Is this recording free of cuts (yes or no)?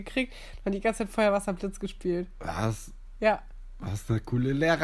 yes